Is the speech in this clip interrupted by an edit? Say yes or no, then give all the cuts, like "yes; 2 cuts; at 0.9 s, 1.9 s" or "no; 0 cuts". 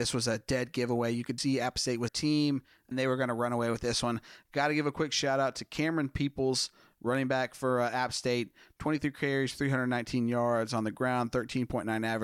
yes; 3 cuts; at 1.4 s, 2.1 s, 2.9 s